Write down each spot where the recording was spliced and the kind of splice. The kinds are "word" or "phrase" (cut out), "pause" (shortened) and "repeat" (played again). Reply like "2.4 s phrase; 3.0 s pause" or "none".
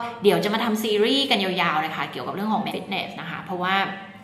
2.7 s word

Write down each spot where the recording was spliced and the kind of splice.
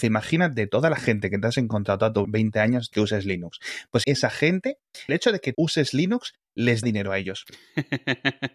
2.2 s word; 2.9 s word; 4.0 s word; 5.1 s word; 5.5 s word; 6.8 s word

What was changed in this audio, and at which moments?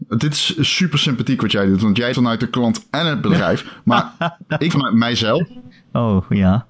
2.1 s word; 4.7 s word

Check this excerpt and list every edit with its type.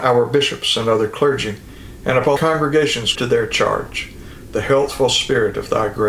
2.4 s word; 3.1 s word

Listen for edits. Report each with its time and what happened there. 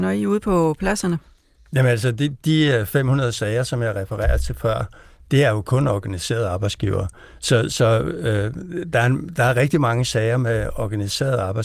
none

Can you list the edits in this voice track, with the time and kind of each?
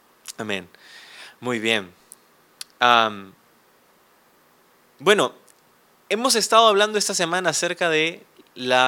none

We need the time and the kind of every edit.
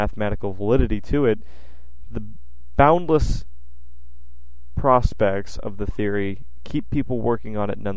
none

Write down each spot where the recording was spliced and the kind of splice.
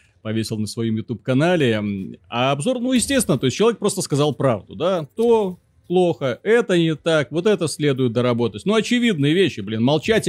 none

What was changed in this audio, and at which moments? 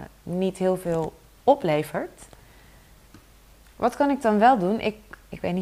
none

